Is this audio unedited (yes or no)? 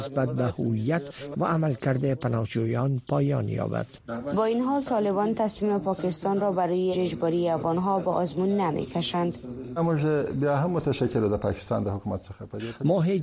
no